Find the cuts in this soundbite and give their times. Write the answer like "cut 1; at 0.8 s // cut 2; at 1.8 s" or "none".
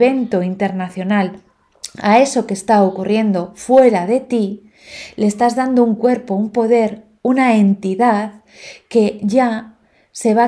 none